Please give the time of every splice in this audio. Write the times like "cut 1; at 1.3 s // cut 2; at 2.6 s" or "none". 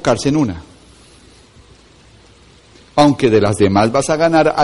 none